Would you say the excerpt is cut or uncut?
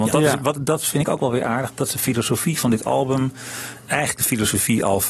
uncut